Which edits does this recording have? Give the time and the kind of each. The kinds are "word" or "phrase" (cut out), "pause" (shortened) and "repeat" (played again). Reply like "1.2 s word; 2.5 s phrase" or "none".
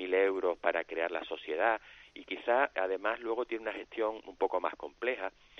2.7 s word